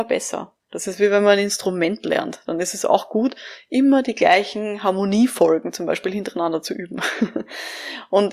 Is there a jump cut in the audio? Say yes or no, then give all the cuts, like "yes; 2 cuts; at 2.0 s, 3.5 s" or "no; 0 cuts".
no; 0 cuts